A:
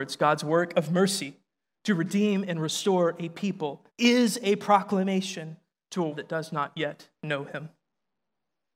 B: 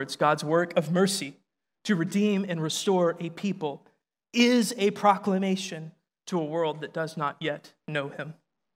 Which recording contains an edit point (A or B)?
A